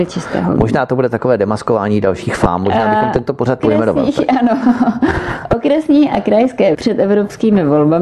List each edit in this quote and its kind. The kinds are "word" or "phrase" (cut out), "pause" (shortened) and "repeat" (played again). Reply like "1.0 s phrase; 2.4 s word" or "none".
3.6 s word; 6.7 s word